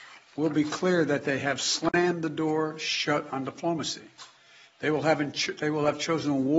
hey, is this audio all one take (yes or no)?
yes